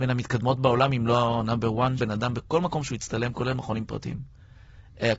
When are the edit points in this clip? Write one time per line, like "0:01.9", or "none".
0:02.0

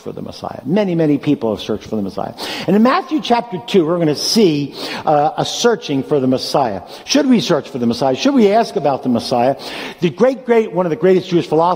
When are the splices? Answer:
none

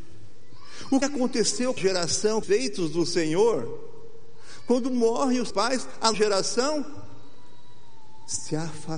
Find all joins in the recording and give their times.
0:01.0
0:01.8
0:02.4
0:05.5
0:06.1

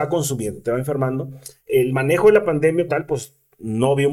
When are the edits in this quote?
0:01.6
0:02.9

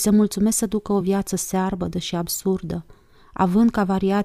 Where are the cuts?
none

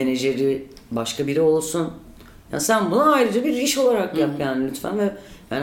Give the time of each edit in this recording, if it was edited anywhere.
none

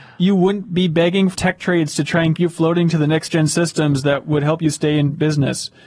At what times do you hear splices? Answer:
0:01.3
0:02.4

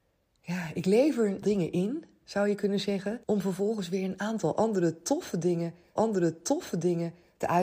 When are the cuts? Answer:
0:01.4
0:03.2
0:06.0

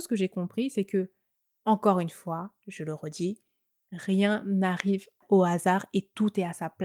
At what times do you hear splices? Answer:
none

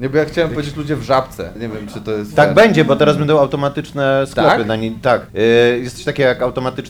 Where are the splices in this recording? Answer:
0:01.6
0:05.3

